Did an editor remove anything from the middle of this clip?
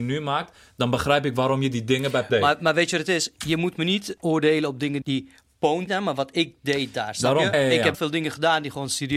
yes; 6 cuts; at 2.3 s, 4.2 s, 5.0 s, 5.9 s, 7.5 s, 7.9 s

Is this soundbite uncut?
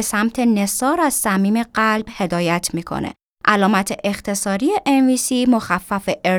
yes; 0 cuts

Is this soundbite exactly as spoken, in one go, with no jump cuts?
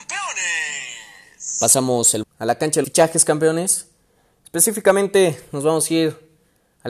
no; 2 cuts; at 2.2 s, 2.8 s

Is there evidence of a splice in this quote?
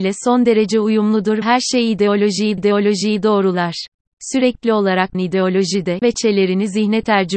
yes; 4 cuts; at 1.4 s, 2.6 s, 5.1 s, 6.0 s

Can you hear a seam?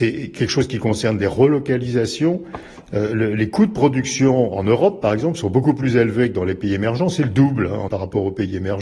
yes; 1 cut; at 7.9 s

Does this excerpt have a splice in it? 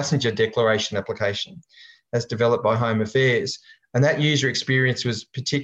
no; 0 cuts

